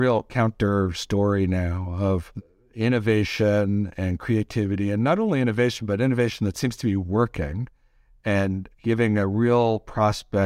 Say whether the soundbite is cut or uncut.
uncut